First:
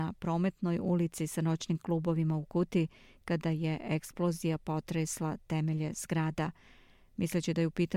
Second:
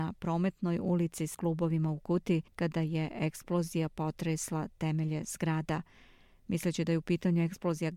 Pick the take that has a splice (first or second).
second